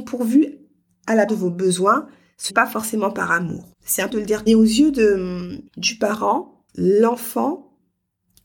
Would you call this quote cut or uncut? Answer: cut